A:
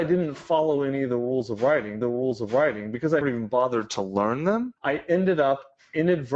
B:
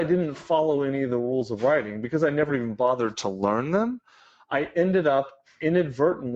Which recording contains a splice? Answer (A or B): A